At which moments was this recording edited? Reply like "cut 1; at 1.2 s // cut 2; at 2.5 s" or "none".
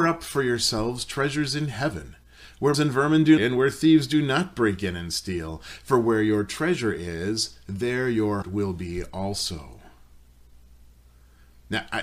cut 1; at 2.7 s // cut 2; at 3.4 s // cut 3; at 8.4 s